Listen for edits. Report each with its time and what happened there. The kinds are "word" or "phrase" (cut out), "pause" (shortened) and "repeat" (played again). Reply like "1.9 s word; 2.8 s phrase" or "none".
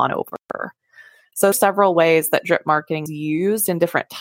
1.5 s phrase; 3.1 s word